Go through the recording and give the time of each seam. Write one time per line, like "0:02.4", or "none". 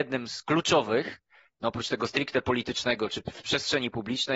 none

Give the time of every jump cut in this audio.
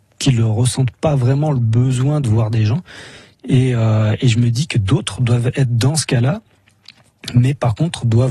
none

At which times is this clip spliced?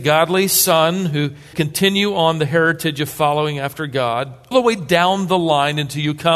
0:01.5
0:04.5

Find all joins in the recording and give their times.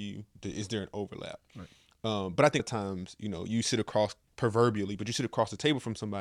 0:02.6

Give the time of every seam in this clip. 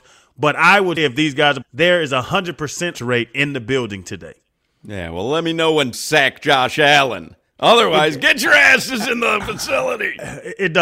0:01.0
0:01.6
0:02.9
0:05.9

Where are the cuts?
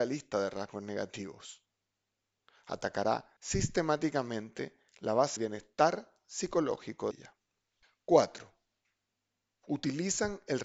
0:03.4
0:05.4
0:07.1
0:07.8

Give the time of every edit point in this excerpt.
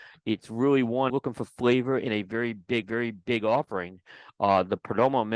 0:01.1
0:02.8

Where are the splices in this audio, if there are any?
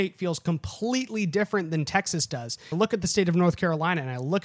0:02.7

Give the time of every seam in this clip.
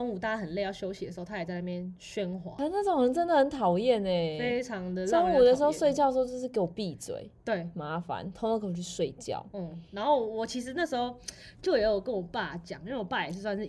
0:09.9

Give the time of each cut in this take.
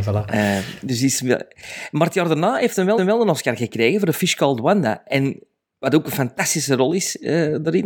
0:03.0

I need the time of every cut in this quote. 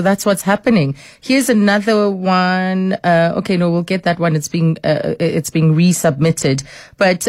none

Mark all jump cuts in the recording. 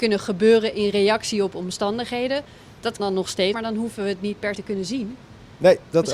0:03.0
0:03.5
0:04.5

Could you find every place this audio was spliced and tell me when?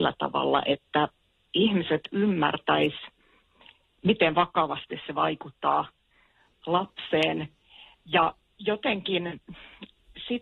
none

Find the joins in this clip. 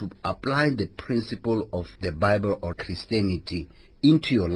0:02.0
0:02.7

